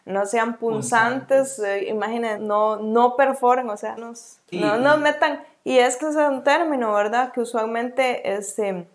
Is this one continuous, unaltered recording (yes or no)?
no